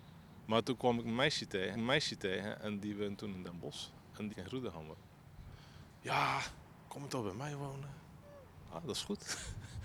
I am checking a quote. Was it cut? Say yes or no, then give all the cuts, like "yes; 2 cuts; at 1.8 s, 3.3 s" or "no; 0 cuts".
yes; 4 cuts; at 1.7 s, 4.3 s, 6.7 s, 8.8 s